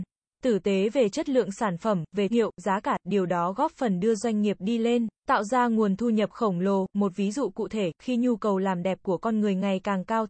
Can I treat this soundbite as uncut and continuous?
no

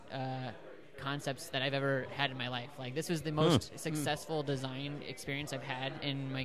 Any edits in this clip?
no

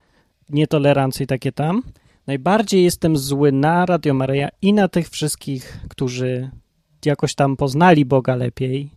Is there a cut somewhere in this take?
no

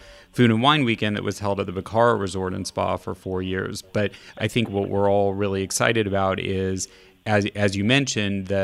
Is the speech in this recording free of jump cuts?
yes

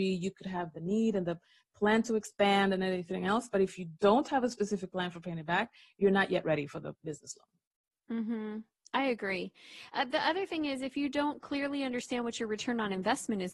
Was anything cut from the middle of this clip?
no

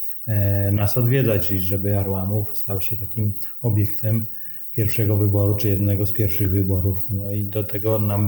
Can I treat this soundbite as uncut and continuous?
yes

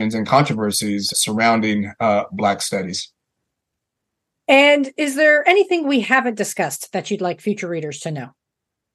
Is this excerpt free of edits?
no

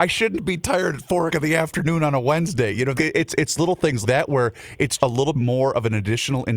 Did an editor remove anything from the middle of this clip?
yes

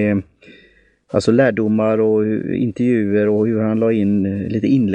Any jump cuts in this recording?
no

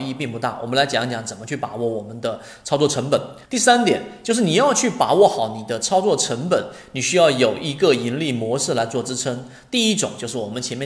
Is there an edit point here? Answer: yes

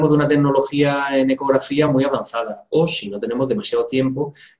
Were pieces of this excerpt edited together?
no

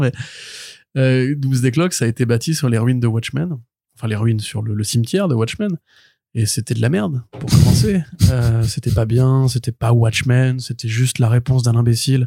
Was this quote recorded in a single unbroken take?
yes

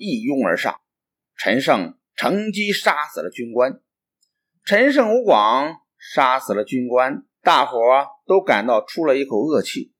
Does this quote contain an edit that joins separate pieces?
yes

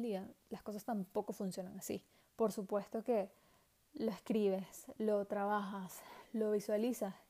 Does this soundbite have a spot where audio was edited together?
yes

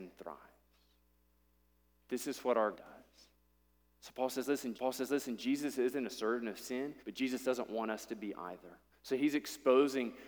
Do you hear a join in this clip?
yes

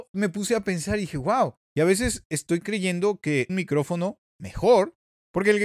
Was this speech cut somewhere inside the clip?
yes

